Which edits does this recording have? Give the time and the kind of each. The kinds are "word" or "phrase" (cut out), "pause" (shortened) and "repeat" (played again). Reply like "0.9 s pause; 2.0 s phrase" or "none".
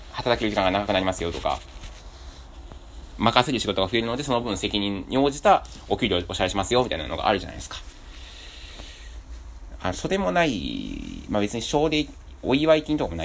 3.1 s phrase